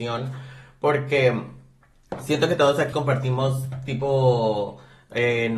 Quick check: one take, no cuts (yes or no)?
no